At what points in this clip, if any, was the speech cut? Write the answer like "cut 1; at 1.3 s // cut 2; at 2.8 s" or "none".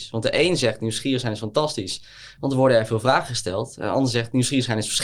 none